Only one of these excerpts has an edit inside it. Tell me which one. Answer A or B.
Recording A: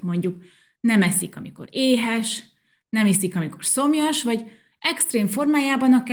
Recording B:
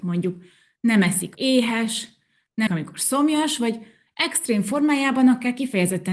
B